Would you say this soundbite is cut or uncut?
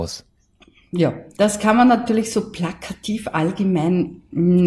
uncut